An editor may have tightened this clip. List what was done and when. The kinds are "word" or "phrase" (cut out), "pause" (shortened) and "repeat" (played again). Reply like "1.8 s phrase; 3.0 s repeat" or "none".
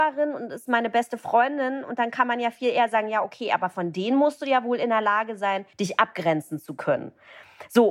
5.7 s pause